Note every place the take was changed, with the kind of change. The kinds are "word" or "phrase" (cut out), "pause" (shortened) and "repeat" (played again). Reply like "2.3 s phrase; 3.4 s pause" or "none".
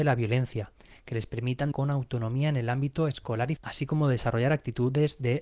1.7 s word; 3.6 s word